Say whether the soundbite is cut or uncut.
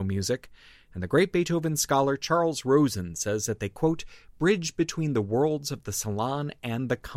uncut